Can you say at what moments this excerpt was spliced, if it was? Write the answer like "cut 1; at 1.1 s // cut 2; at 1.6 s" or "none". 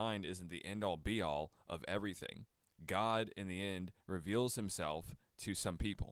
none